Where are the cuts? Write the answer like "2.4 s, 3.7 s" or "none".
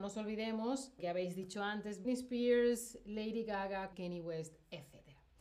1.0 s, 2.0 s, 3.9 s